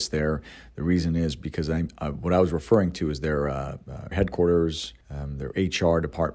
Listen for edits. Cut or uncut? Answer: cut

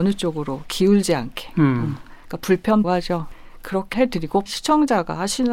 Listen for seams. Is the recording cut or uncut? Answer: cut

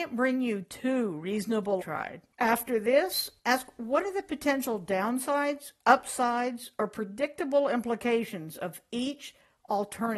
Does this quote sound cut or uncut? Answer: cut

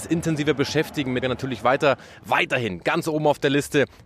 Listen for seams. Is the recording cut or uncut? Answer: cut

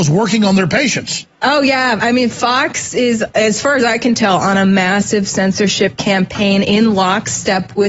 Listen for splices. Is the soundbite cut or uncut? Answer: cut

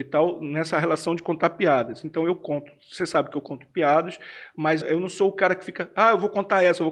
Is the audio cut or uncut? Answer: cut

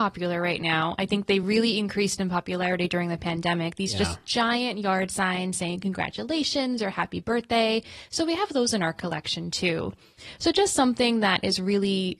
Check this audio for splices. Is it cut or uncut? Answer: uncut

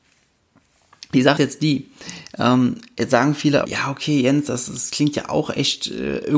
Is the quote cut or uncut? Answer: cut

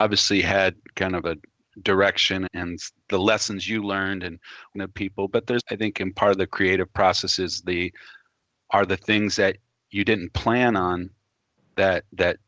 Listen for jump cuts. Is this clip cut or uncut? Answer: cut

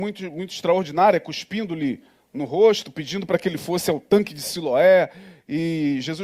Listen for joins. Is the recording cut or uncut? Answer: uncut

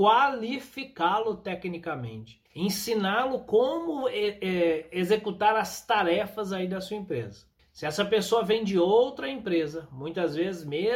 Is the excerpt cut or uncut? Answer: cut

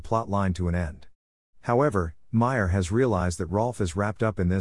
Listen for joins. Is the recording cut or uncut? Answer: uncut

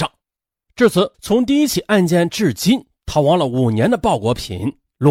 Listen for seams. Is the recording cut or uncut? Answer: cut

